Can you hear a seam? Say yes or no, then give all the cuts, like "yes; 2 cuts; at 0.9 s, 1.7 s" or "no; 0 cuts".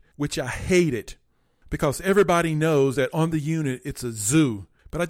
no; 0 cuts